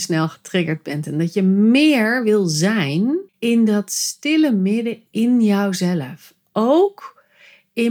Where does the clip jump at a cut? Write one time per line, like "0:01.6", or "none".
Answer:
0:03.3